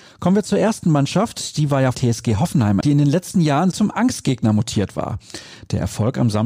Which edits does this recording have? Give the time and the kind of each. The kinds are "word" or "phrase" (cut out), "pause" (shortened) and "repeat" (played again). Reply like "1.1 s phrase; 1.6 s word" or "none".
1.9 s phrase; 2.8 s word; 3.7 s phrase